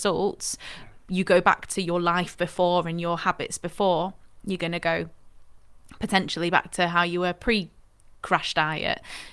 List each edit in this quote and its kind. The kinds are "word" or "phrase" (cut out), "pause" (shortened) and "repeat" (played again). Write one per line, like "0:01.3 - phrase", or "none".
none